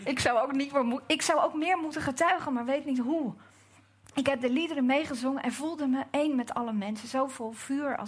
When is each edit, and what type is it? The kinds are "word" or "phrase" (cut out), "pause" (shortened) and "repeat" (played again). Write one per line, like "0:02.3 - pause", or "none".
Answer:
none